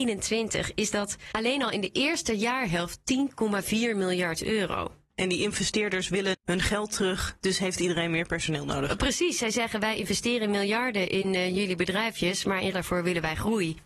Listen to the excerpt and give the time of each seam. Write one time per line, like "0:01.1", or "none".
0:06.3
0:12.7